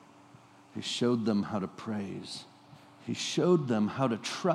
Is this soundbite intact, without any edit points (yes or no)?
no